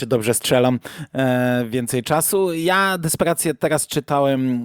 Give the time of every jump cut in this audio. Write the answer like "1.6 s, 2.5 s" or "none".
none